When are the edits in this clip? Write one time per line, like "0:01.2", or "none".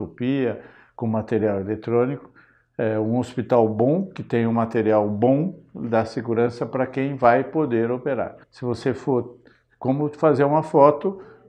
0:08.4